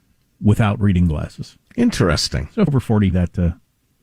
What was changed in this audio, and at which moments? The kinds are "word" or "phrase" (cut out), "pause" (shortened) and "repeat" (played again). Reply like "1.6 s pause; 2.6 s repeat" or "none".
1.6 s pause; 2.7 s word; 3.1 s word